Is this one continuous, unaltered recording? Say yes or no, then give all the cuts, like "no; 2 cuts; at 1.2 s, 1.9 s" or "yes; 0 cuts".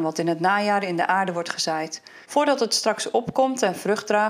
no; 1 cut; at 2.2 s